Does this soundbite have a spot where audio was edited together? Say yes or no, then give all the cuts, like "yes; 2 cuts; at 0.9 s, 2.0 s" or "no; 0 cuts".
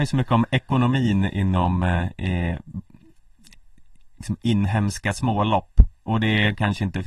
yes; 2 cuts; at 4.1 s, 6.0 s